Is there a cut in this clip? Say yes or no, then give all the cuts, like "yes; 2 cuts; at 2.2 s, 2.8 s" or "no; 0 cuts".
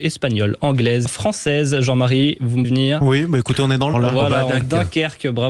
yes; 4 cuts; at 1.1 s, 2.6 s, 3.9 s, 4.6 s